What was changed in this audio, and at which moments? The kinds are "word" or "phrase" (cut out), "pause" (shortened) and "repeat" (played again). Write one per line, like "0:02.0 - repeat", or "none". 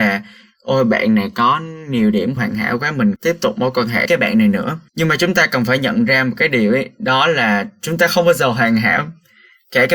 0:02.4 - word
0:03.2 - word
0:04.1 - word
0:04.9 - pause